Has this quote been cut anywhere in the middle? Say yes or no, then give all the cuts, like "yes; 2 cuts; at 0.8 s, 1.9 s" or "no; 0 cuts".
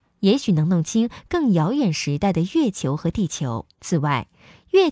yes; 1 cut; at 3.7 s